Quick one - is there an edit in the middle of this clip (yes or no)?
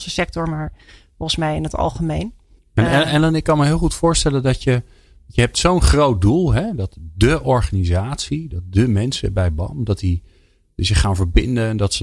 yes